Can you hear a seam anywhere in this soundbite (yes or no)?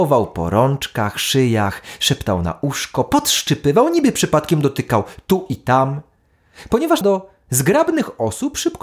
yes